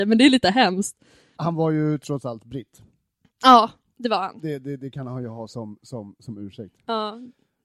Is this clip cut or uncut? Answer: uncut